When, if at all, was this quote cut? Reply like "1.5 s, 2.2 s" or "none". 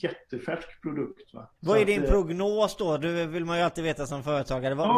1.6 s